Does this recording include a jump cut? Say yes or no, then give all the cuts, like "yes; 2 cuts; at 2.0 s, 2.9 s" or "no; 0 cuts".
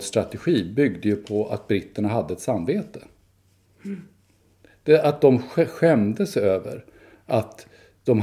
no; 0 cuts